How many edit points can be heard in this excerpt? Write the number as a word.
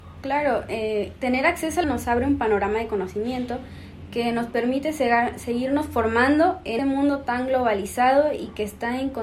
two